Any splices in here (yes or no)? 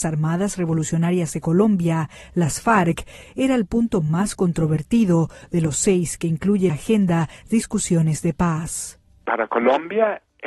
yes